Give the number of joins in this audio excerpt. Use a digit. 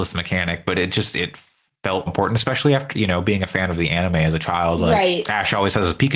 1